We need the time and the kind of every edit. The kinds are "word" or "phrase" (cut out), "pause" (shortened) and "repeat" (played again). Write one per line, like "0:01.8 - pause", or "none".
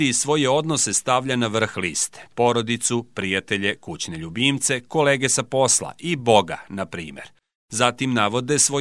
none